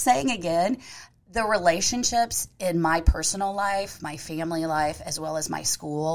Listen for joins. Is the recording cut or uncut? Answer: uncut